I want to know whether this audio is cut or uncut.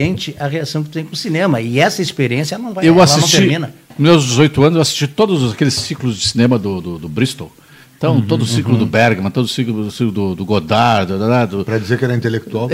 uncut